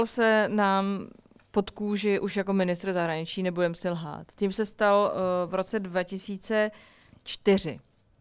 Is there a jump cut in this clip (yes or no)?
no